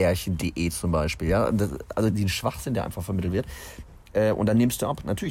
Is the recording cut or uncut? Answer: cut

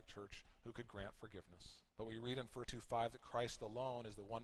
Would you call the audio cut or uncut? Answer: cut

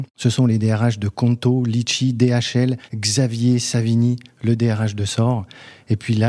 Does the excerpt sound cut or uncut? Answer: cut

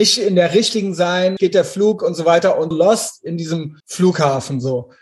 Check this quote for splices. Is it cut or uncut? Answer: cut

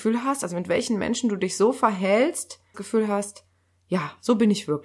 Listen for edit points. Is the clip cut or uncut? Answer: cut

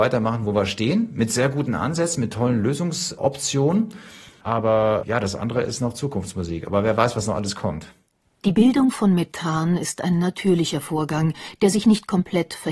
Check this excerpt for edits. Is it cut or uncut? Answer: uncut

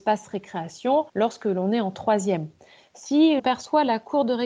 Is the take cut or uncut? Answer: cut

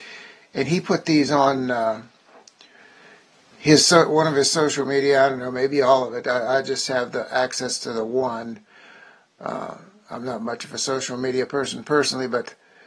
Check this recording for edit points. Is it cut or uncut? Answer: uncut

